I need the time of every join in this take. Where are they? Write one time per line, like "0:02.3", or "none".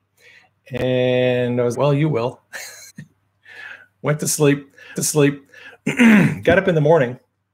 0:01.7
0:02.9
0:05.0